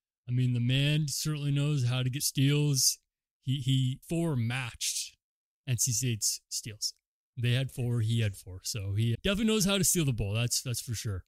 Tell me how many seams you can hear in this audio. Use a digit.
3